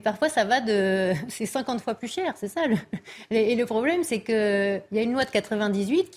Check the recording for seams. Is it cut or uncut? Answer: uncut